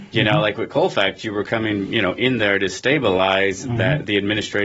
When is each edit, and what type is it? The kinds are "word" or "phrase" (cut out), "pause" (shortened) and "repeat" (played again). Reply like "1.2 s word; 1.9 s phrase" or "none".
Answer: none